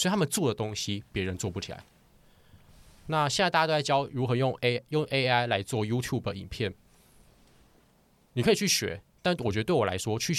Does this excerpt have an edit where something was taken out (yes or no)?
no